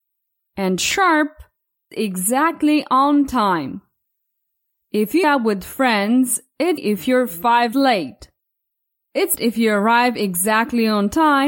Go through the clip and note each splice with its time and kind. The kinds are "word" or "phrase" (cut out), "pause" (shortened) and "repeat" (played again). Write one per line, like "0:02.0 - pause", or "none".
0:01.9 - word
0:05.2 - word
0:06.8 - word
0:07.7 - word
0:09.4 - word